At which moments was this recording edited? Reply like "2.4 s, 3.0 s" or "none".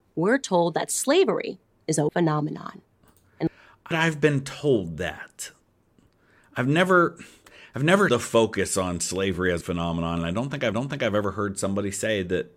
2.1 s, 3.9 s, 8.1 s, 9.6 s, 10.7 s